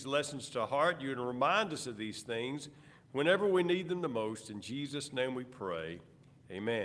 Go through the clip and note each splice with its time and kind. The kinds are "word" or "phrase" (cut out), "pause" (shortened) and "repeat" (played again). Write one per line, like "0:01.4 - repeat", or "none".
none